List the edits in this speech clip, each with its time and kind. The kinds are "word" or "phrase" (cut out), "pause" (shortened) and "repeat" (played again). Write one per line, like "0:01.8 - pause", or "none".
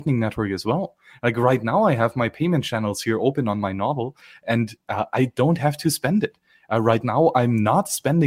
none